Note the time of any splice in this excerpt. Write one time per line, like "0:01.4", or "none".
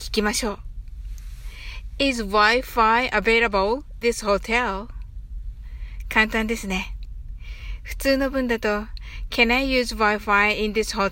0:04.0